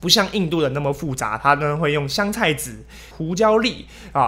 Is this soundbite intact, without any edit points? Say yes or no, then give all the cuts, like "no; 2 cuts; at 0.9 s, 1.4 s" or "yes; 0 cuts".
no; 1 cut; at 3.1 s